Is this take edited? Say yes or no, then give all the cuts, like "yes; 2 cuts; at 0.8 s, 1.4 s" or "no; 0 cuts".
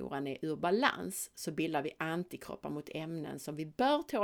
no; 0 cuts